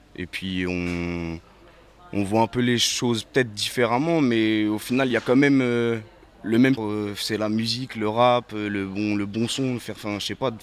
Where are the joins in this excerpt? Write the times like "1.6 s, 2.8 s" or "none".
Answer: 6.8 s